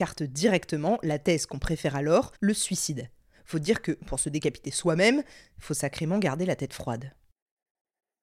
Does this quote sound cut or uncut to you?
cut